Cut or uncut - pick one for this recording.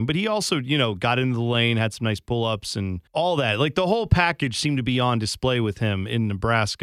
cut